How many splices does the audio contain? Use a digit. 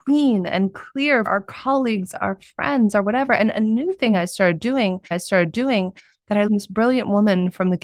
3